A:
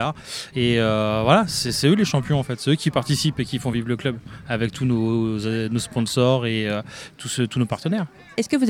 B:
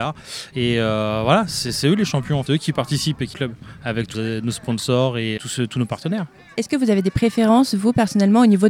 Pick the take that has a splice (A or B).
B